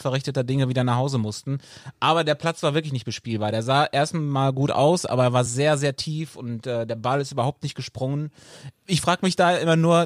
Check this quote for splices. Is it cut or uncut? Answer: uncut